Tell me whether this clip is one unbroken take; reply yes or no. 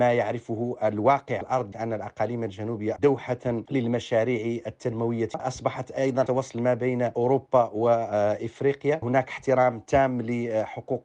no